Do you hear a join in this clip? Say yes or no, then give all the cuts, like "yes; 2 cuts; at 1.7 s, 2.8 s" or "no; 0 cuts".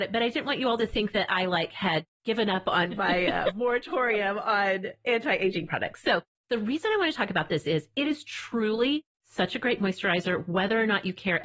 yes; 3 cuts; at 2.1 s, 6.4 s, 9.1 s